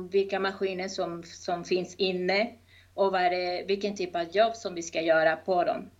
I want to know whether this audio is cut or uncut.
uncut